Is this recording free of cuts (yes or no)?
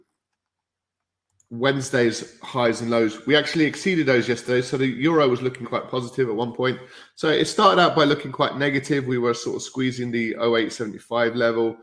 no